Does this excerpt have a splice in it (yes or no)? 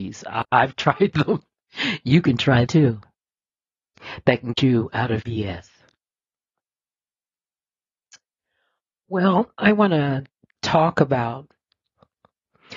yes